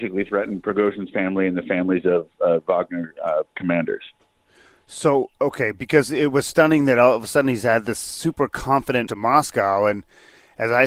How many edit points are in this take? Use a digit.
1